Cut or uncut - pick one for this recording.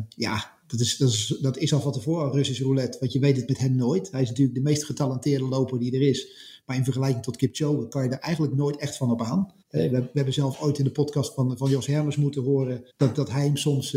cut